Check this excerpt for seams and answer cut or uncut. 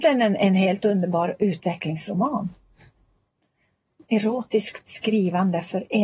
uncut